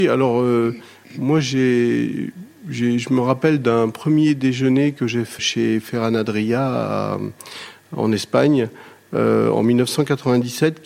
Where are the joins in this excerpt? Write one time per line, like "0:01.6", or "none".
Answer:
0:05.4